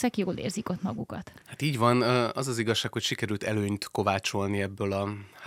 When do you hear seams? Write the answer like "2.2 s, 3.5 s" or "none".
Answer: 1.4 s

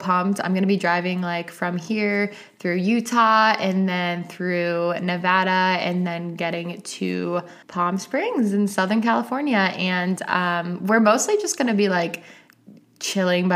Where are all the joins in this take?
7.6 s

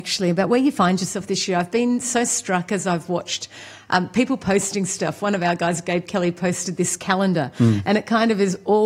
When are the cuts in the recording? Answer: none

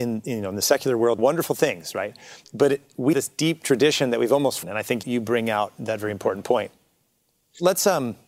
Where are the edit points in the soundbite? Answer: 1.2 s, 2.4 s, 3.1 s, 4.6 s, 5.0 s, 5.7 s

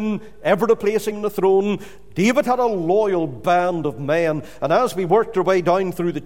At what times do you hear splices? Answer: 1.1 s

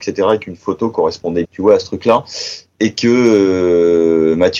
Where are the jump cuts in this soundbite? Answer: 1.4 s

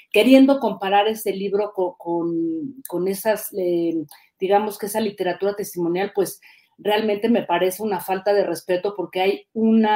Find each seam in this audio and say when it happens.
none

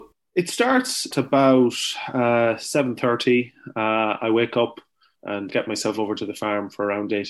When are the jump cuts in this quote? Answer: 1.1 s, 5.5 s

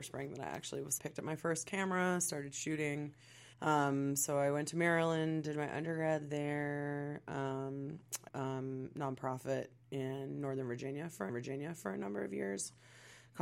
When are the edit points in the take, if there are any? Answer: 1.0 s, 3.5 s, 8.3 s, 11.3 s

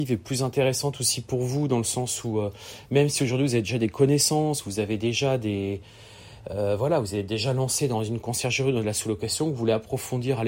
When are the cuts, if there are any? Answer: none

